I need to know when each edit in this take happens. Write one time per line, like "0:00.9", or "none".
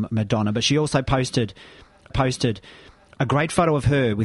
0:02.1